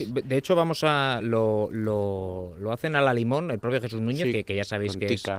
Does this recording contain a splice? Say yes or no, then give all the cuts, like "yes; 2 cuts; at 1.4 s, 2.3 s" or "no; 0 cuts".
no; 0 cuts